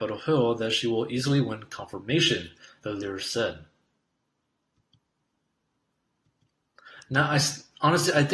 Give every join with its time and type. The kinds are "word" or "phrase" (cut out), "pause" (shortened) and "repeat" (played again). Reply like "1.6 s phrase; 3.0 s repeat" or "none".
none